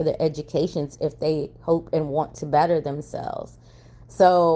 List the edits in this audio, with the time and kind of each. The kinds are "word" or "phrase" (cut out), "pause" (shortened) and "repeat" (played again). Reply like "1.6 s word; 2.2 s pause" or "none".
none